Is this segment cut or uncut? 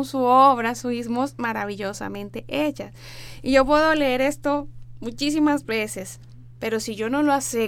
uncut